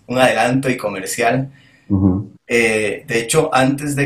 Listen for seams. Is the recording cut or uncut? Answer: cut